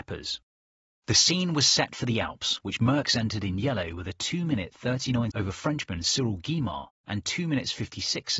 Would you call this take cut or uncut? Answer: cut